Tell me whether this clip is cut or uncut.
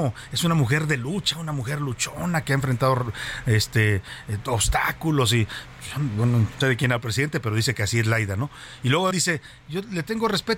cut